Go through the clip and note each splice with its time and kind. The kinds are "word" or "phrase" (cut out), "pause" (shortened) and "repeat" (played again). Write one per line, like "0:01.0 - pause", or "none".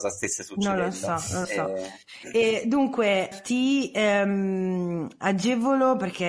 0:01.4 - word
0:03.3 - word